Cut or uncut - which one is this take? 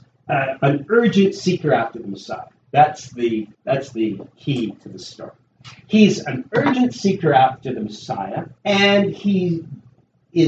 cut